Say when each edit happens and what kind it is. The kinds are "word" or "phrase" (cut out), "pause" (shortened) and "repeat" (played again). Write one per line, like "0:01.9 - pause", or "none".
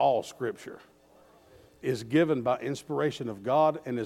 none